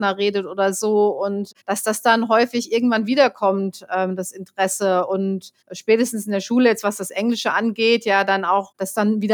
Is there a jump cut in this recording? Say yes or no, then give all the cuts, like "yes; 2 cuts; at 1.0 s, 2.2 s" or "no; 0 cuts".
yes; 2 cuts; at 1.6 s, 5.6 s